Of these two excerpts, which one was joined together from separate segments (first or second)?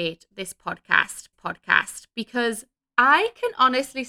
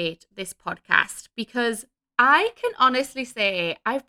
first